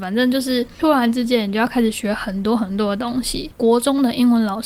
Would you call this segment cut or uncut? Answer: cut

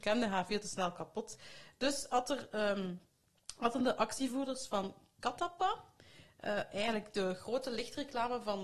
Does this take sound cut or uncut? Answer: uncut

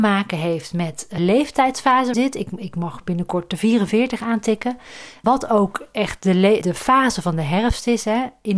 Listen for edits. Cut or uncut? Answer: cut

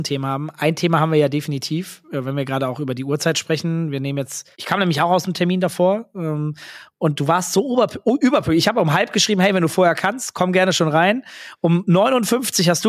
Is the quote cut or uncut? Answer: cut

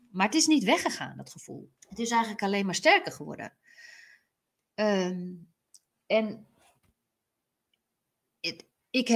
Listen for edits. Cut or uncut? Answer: cut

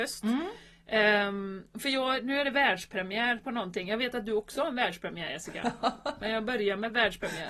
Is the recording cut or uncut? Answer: uncut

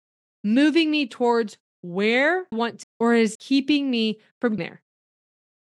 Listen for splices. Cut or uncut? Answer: cut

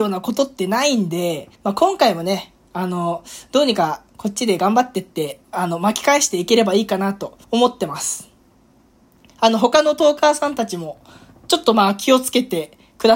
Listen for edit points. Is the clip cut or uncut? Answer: cut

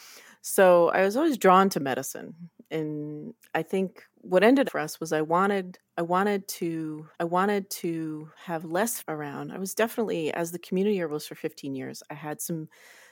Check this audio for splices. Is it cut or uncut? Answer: cut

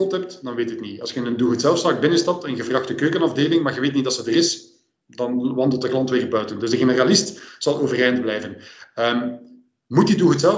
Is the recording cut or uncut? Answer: uncut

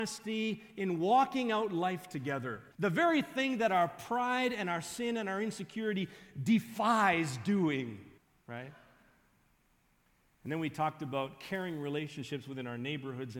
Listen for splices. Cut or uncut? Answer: cut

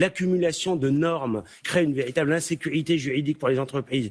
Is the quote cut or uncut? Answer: cut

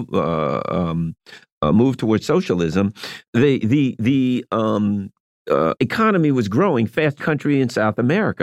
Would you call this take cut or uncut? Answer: cut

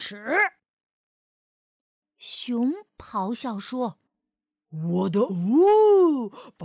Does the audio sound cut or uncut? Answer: cut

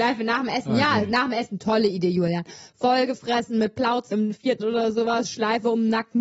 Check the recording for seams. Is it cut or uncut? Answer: cut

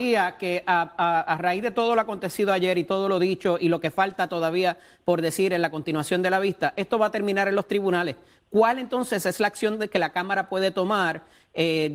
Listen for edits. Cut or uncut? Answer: uncut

